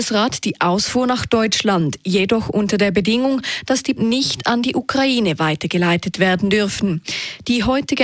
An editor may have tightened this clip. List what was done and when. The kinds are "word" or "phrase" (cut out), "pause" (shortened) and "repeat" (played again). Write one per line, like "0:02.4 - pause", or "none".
0:04.0 - word